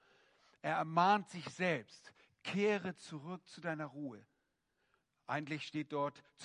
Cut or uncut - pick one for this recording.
uncut